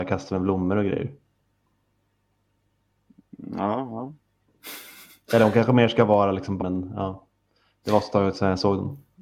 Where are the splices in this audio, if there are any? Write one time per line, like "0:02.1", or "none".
0:06.6